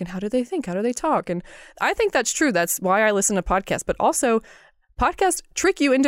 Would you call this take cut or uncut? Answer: uncut